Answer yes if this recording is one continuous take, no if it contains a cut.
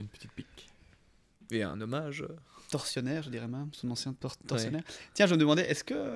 yes